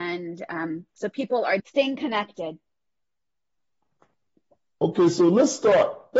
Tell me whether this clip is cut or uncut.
cut